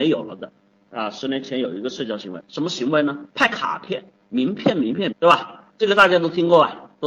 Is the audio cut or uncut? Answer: cut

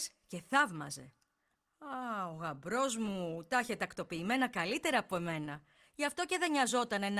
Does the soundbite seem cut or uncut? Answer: uncut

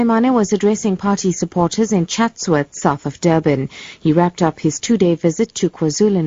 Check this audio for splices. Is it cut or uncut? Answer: uncut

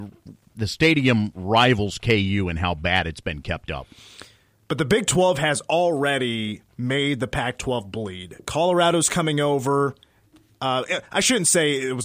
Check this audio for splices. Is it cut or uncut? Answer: uncut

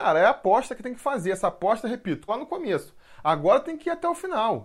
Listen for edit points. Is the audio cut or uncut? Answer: cut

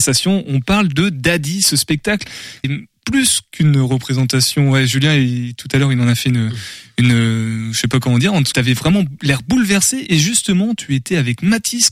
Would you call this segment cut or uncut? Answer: cut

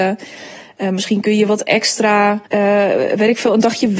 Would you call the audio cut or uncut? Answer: cut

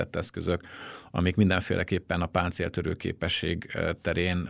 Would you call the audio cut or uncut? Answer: uncut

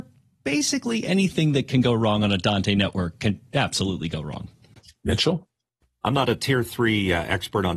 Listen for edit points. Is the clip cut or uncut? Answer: uncut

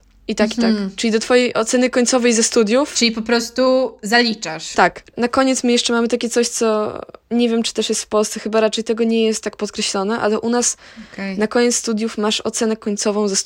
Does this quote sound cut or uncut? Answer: uncut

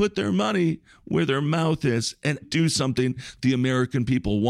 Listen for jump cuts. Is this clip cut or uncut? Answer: cut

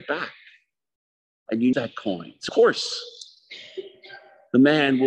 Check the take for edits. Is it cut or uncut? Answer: cut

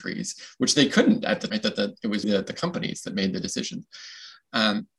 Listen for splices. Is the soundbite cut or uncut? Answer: cut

